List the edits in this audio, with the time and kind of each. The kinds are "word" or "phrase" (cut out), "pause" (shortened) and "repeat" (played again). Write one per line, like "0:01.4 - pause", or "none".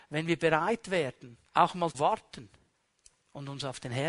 0:01.5 - pause
0:01.9 - word
0:02.7 - pause